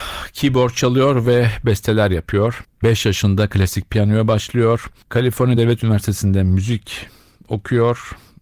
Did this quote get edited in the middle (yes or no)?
no